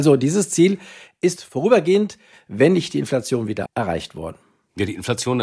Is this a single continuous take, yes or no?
no